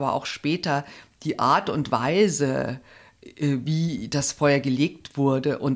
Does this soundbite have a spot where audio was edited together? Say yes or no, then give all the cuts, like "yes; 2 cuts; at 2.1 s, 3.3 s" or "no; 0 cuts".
no; 0 cuts